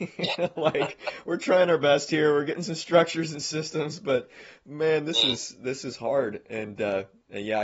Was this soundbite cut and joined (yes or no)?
no